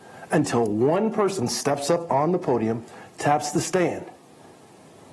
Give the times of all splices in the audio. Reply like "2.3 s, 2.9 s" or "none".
none